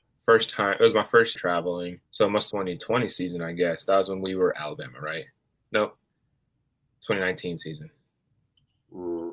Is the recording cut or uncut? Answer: cut